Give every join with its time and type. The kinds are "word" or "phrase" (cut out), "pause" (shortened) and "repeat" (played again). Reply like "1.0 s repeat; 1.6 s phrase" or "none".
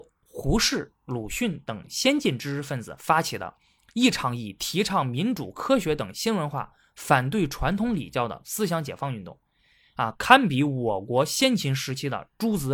none